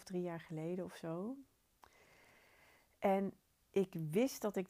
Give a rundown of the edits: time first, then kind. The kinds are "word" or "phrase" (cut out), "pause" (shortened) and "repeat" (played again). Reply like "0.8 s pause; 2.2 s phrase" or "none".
none